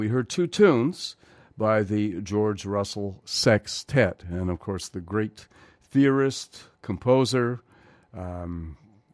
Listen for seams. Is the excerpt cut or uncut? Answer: uncut